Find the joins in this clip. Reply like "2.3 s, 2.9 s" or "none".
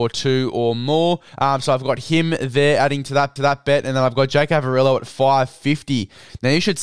1.3 s, 3.4 s